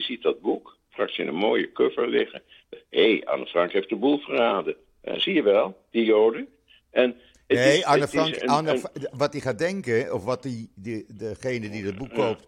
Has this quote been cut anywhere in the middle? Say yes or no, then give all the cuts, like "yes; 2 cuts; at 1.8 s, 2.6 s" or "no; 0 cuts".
no; 0 cuts